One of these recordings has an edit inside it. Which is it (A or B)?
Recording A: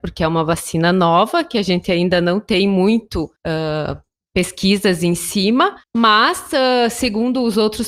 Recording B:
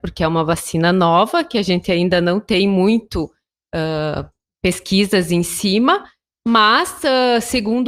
A